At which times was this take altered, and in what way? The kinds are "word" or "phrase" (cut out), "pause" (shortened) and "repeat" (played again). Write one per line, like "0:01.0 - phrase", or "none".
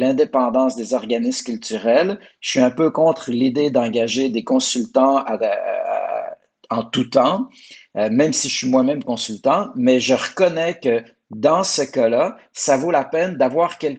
none

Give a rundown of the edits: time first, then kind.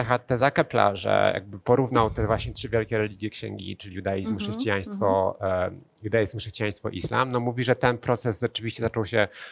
none

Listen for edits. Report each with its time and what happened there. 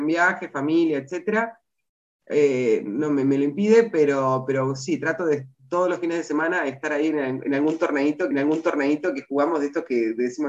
0:08.3 - repeat

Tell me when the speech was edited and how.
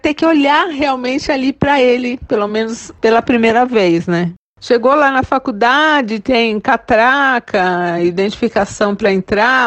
none

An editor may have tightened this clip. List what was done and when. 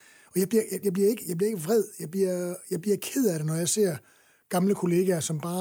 none

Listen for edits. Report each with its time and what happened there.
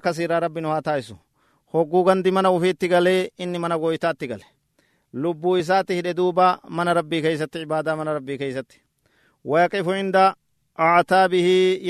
none

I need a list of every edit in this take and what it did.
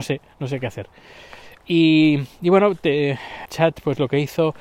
0:03.5 - word

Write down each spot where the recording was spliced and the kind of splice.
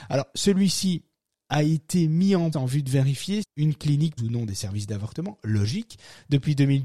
0:02.5 - word
0:03.4 - word
0:04.2 - word

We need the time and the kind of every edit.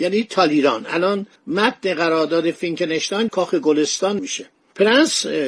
0:01.4 - pause
0:03.3 - word
0:04.2 - word

